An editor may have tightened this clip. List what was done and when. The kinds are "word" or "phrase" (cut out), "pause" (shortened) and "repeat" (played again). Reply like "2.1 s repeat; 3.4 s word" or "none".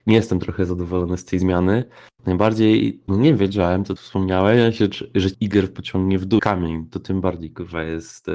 3.1 s word; 4.0 s word; 5.3 s word; 6.4 s word